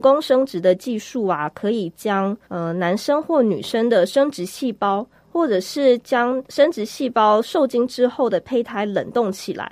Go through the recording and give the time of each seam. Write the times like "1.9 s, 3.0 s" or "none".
2.4 s

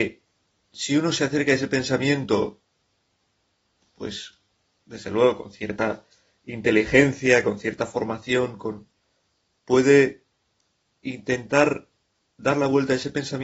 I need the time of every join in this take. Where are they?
none

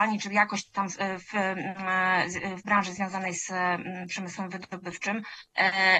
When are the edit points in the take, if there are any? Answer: none

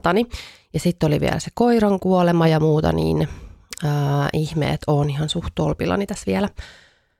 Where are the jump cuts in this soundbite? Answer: none

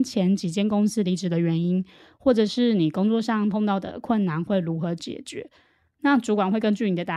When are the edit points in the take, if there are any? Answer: none

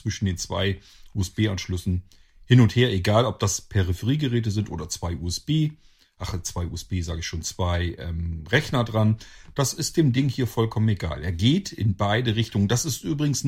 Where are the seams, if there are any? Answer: none

